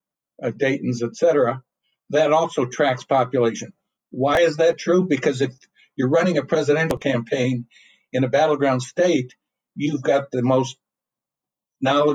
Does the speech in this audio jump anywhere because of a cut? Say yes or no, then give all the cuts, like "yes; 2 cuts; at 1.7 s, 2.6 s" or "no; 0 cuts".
no; 0 cuts